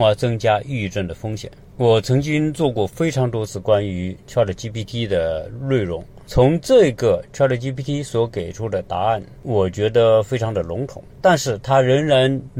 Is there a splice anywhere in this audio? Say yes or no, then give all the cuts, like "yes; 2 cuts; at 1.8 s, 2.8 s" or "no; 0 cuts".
yes; 1 cut; at 11.1 s